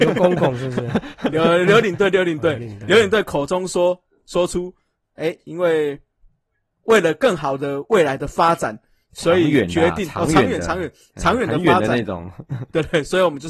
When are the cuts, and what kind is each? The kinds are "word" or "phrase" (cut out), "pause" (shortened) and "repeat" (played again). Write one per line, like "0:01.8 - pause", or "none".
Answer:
none